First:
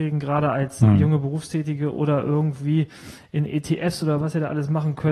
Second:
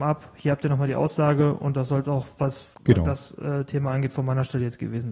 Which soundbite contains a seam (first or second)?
second